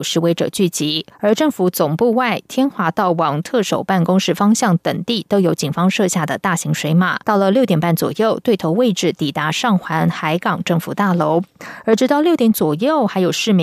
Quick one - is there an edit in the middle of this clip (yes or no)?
yes